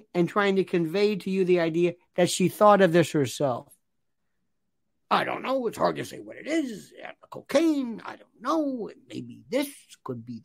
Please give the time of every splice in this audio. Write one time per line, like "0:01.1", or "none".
none